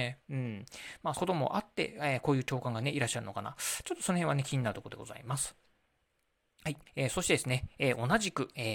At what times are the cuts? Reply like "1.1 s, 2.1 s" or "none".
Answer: 1.1 s, 6.9 s